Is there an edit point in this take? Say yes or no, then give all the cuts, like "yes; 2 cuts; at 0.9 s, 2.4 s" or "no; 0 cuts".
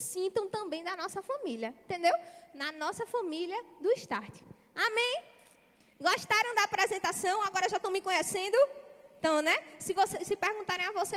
no; 0 cuts